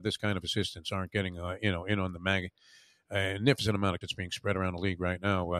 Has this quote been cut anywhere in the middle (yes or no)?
yes